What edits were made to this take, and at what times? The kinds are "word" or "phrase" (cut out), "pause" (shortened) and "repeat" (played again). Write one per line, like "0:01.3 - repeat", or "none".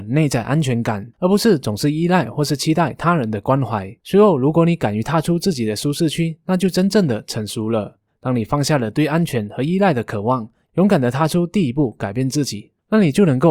0:01.1 - pause
0:04.0 - pause
0:08.1 - pause